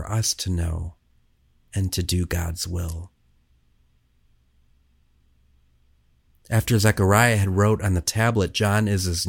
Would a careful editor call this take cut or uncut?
uncut